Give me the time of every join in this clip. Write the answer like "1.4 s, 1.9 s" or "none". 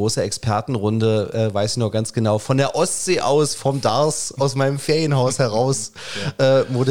none